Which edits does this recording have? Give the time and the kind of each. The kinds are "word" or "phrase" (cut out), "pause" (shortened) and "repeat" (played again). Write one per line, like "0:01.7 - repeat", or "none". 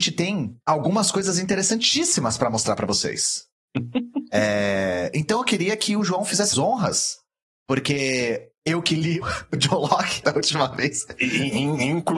0:06.5 - word
0:09.2 - word
0:10.2 - word